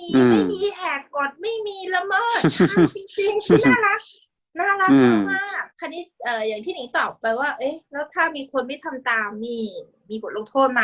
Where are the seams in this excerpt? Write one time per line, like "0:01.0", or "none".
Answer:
0:05.7

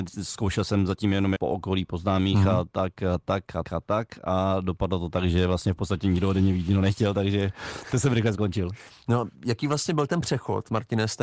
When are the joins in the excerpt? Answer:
0:01.4
0:03.6

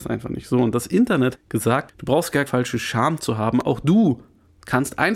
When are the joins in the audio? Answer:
0:01.3
0:01.9
0:02.5

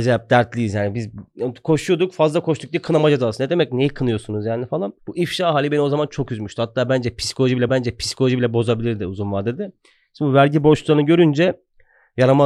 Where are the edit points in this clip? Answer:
0:05.0
0:07.7

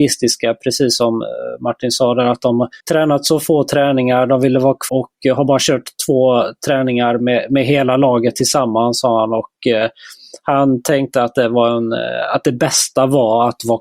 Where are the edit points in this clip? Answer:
0:02.8
0:04.9

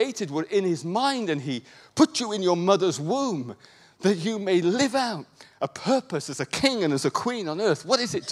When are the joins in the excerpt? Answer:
none

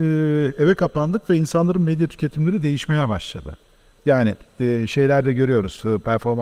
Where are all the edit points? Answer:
none

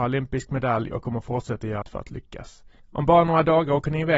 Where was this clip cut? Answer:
0:01.8
0:02.8

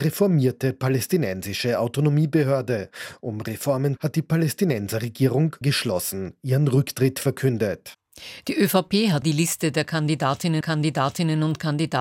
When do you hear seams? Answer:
0:04.0
0:05.6
0:09.2
0:10.6

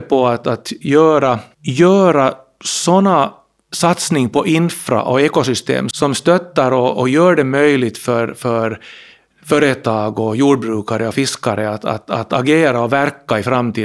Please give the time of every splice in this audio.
0:03.6
0:05.9

